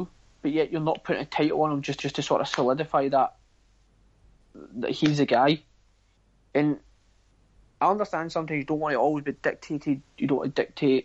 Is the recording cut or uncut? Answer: cut